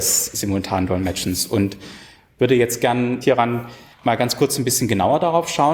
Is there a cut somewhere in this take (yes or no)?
yes